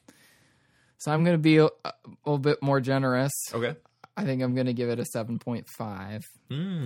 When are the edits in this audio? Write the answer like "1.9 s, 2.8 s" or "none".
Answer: none

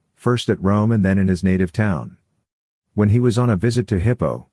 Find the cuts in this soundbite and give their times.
none

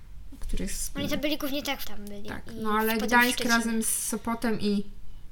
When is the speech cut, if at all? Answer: 1.8 s

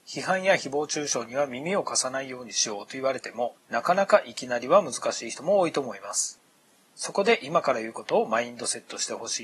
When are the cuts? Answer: 3.6 s

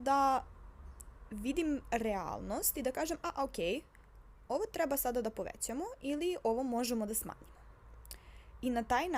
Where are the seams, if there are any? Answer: none

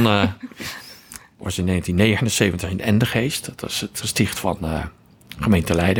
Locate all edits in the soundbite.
4.0 s

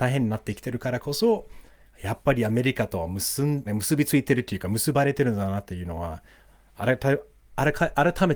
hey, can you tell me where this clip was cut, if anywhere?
3.7 s

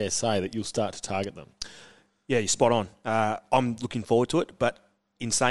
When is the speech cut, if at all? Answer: none

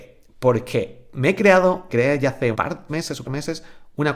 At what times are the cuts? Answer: 1.9 s, 2.5 s, 2.9 s, 3.2 s

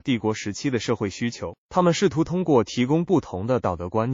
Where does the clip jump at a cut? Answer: 1.6 s

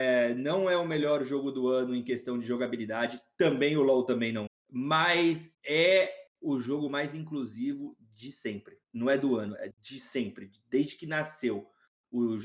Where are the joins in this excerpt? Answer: 4.5 s, 5.5 s, 8.8 s, 9.7 s

